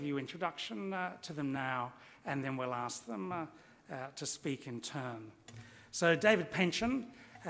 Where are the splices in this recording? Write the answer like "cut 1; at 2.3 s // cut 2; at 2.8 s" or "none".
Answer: none